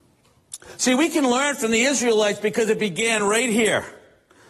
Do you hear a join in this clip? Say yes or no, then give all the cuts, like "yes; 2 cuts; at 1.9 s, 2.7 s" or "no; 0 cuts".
no; 0 cuts